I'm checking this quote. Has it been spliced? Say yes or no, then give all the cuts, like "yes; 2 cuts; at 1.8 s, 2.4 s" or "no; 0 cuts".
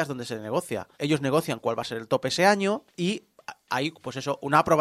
yes; 2 cuts; at 0.9 s, 2.9 s